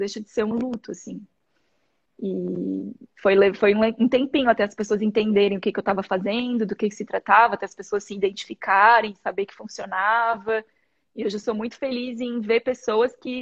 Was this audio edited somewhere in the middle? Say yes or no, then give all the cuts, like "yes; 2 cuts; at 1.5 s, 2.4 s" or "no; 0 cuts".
no; 0 cuts